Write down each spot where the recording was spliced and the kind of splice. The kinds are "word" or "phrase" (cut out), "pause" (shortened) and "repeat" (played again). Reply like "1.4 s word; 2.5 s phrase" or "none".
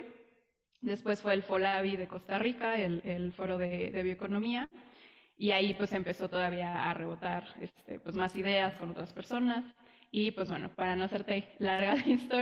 none